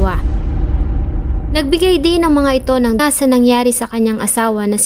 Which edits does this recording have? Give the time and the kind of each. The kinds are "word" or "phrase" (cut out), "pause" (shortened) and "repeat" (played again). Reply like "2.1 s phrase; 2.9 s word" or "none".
3.0 s phrase